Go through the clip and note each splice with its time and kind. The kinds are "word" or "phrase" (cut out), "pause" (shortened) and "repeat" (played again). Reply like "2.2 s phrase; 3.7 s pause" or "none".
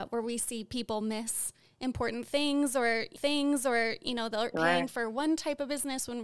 3.2 s repeat; 4.5 s word

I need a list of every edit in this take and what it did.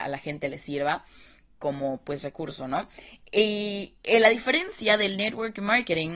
none

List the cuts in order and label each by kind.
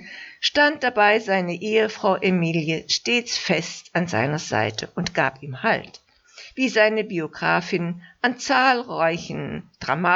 none

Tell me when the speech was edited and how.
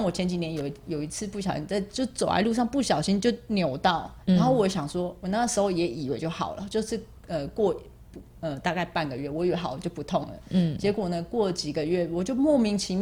4.2 s pause

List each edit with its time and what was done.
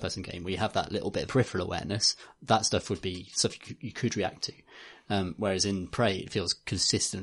1.3 s word

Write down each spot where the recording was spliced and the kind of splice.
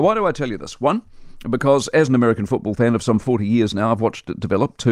none

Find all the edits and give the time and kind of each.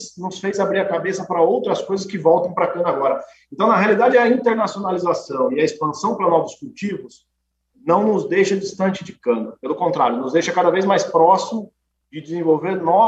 none

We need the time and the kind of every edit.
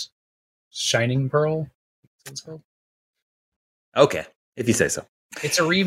none

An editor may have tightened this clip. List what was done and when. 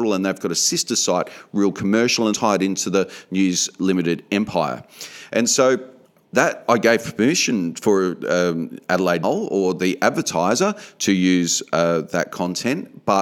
2.3 s phrase; 6.0 s pause; 9.2 s word

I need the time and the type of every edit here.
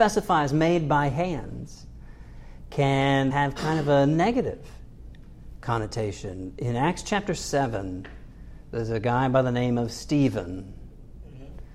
3.3 s word

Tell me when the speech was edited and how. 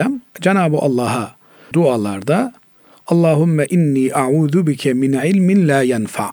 1.7 s word

